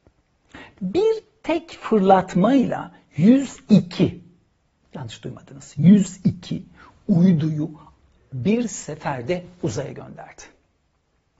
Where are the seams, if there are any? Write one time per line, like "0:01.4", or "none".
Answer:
none